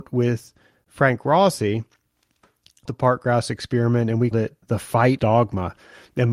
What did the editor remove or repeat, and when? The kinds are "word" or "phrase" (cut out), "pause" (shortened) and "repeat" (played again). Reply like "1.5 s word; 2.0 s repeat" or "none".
2.9 s word; 4.3 s word; 4.6 s word; 5.2 s word